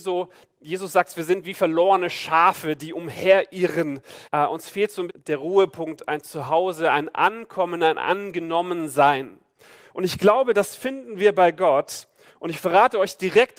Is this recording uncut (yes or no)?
no